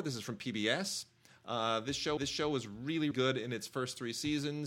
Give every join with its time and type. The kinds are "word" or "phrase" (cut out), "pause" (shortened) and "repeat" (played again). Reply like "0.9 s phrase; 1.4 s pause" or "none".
2.2 s repeat; 3.1 s word